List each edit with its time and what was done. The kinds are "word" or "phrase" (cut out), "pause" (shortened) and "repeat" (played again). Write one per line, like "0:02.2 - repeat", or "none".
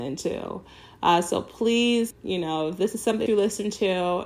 0:02.1 - word
0:03.3 - word